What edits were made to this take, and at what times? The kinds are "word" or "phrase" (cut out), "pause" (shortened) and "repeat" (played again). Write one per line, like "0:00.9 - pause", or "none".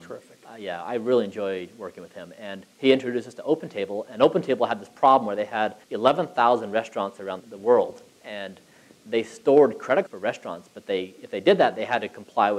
0:05.8 - pause
0:07.4 - word
0:10.1 - phrase